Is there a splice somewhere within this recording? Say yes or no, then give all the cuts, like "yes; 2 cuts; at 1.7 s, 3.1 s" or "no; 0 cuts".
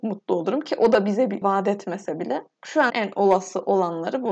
yes; 2 cuts; at 1.4 s, 2.9 s